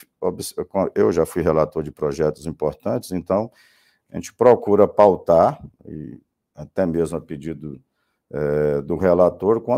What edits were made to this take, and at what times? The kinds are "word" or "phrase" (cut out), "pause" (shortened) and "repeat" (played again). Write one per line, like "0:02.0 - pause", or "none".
none